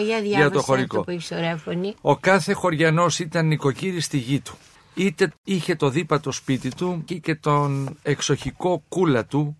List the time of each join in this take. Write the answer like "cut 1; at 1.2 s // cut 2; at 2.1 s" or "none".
cut 1; at 7.1 s